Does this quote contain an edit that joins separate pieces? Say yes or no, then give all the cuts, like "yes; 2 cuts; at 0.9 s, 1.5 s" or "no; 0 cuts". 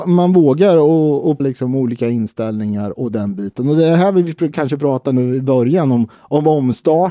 yes; 2 cuts; at 1.4 s, 6.1 s